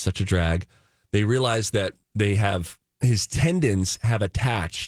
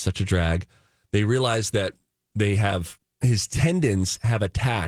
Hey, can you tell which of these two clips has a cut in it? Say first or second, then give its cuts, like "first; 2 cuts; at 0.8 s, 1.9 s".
first; 1 cut; at 2.0 s